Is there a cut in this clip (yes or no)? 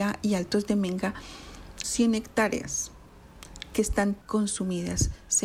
yes